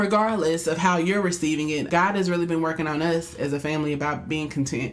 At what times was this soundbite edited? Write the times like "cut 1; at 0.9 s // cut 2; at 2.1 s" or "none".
cut 1; at 1.9 s